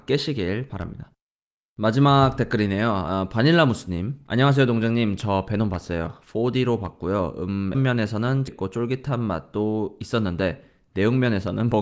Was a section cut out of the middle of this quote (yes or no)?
yes